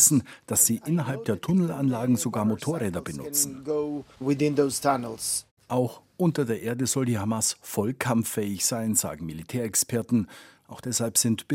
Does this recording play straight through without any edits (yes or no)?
yes